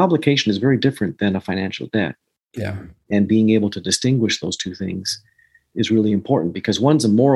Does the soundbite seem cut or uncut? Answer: uncut